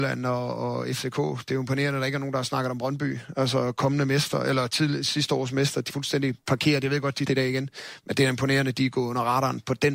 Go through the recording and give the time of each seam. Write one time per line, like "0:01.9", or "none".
0:05.9
0:07.3

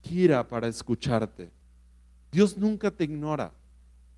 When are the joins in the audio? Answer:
none

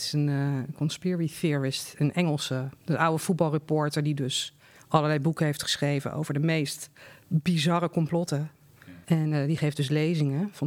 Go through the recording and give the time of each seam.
0:09.0

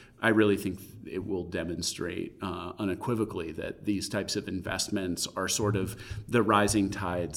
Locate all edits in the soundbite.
none

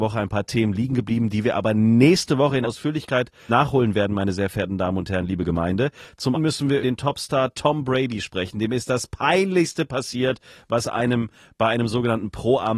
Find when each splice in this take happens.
0:02.6
0:03.5
0:06.3
0:06.8

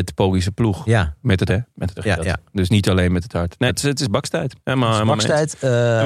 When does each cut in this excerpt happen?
0:01.5
0:02.0
0:03.7
0:04.6

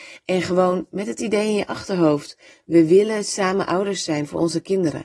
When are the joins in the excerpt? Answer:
none

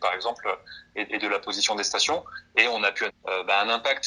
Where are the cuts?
0:03.1

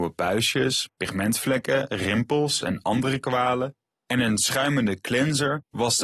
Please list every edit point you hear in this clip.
none

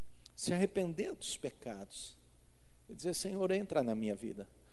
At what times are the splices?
none

